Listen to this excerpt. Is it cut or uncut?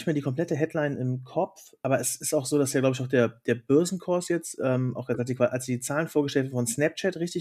uncut